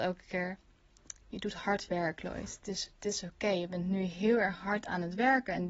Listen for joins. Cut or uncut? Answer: uncut